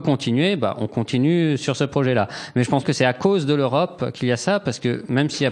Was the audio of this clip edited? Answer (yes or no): yes